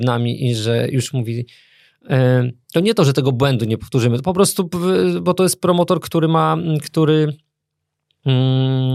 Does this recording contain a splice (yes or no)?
no